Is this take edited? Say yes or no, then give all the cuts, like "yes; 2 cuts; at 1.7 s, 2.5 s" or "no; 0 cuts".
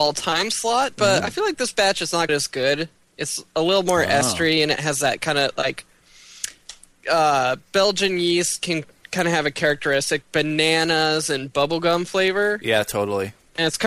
yes; 3 cuts; at 1.2 s, 2.3 s, 10.2 s